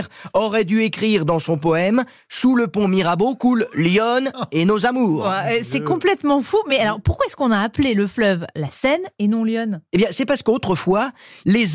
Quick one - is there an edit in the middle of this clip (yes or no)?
no